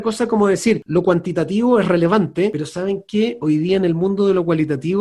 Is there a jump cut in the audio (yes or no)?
no